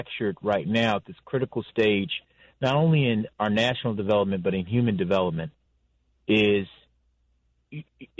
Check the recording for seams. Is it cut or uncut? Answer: uncut